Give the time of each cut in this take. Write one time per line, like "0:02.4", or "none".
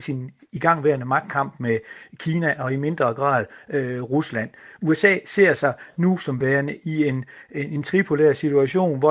none